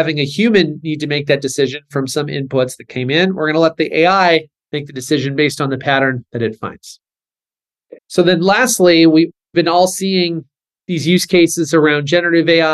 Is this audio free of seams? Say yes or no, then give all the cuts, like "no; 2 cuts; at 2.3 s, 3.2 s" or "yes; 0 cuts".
no; 1 cut; at 8.0 s